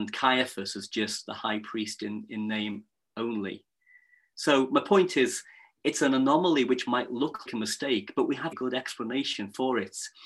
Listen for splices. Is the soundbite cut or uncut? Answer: cut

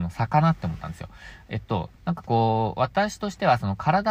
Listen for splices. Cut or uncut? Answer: cut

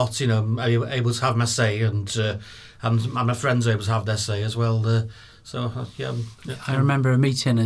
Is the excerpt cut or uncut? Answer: uncut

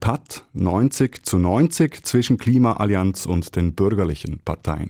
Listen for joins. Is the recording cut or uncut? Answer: uncut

